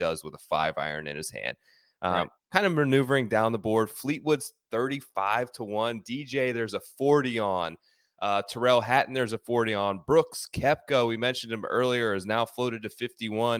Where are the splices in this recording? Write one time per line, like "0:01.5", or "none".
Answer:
none